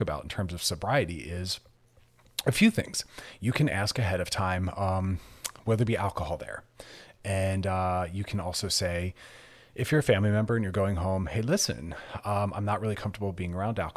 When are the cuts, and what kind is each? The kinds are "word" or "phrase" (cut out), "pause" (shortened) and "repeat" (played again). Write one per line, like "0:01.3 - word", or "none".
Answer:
none